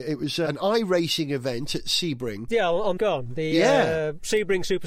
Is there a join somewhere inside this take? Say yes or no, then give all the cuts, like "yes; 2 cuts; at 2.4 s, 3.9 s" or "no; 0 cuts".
yes; 1 cut; at 3.0 s